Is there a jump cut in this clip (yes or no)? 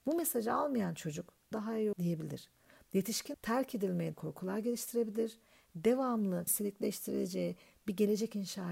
yes